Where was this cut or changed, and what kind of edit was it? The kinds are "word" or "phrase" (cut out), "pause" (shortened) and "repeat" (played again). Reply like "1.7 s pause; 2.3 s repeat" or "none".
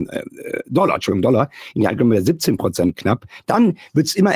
none